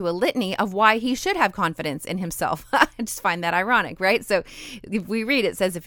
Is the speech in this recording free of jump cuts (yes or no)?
yes